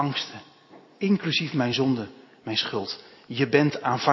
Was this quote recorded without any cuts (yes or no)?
yes